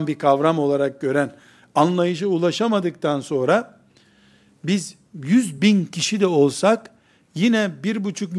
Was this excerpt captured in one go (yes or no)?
yes